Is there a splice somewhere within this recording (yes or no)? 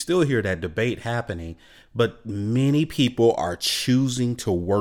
no